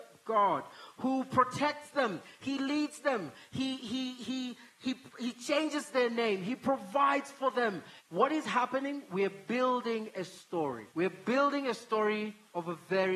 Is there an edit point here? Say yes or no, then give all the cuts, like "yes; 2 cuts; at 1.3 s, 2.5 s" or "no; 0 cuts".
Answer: yes; 2 cuts; at 8.0 s, 10.9 s